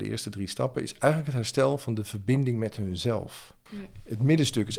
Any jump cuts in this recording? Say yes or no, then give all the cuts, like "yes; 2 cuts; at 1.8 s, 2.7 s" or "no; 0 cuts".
no; 0 cuts